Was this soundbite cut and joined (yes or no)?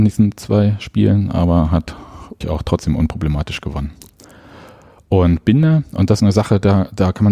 yes